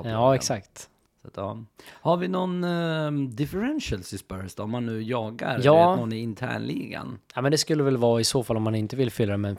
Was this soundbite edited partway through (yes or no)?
yes